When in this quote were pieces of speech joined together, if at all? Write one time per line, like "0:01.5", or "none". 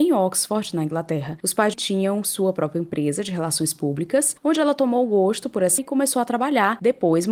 0:01.7
0:05.8